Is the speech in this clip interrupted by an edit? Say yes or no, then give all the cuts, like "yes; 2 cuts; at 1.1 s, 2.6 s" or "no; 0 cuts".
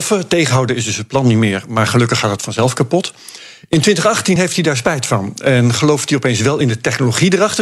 no; 0 cuts